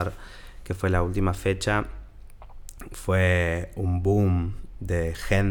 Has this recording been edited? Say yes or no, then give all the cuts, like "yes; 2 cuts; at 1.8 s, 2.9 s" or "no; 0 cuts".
no; 0 cuts